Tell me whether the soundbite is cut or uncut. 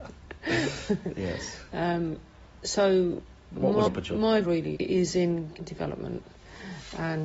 cut